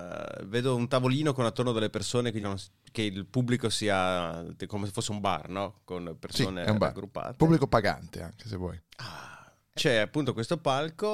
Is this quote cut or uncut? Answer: cut